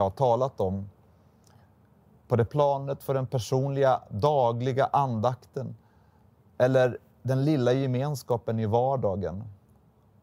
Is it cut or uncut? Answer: cut